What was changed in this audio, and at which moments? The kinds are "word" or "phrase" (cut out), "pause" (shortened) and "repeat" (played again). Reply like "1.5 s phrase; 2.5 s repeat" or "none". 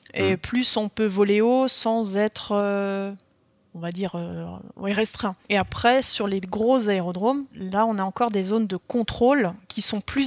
none